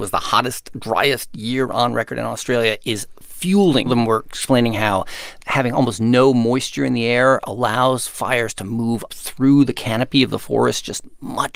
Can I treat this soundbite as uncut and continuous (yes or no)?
no